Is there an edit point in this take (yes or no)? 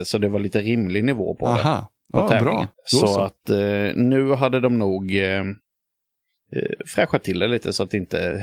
yes